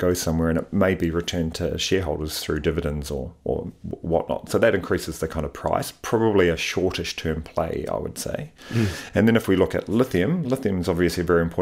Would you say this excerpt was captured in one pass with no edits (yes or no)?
yes